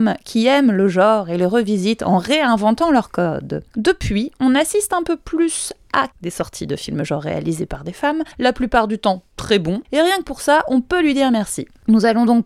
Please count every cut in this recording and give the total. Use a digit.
4